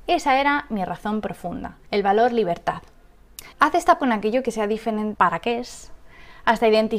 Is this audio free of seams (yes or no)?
no